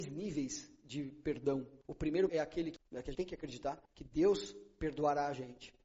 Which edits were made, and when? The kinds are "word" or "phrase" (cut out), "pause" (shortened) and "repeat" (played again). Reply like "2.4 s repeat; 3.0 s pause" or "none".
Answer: 1.8 s pause; 2.3 s word; 2.8 s word; 3.1 s word; 3.9 s pause

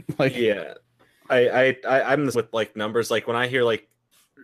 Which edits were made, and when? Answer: 2.3 s word

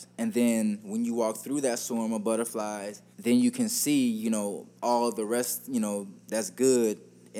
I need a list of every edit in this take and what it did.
3.1 s pause; 4.8 s pause; 6.2 s pause

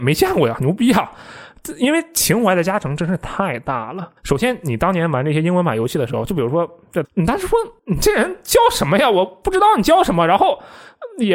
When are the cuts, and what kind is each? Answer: 4.2 s pause; 7.0 s phrase; 7.8 s pause

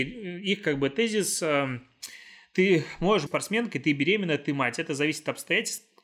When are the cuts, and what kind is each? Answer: 3.3 s word

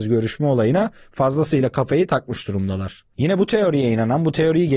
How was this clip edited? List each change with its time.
none

